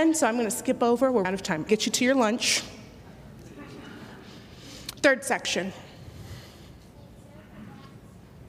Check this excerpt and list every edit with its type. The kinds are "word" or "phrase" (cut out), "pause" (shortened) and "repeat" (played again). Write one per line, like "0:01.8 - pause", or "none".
0:01.2 - word
0:01.7 - phrase